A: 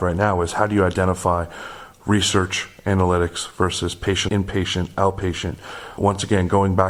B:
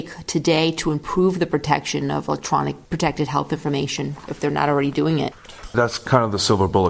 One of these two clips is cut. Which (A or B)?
A